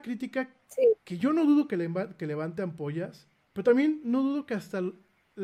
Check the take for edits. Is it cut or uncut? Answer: uncut